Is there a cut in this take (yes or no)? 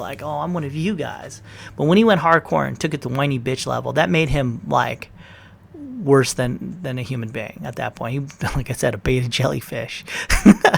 no